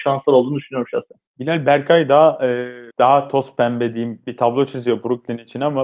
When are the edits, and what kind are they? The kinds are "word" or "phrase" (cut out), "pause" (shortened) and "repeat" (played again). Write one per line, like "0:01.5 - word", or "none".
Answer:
0:01.3 - pause
0:02.9 - pause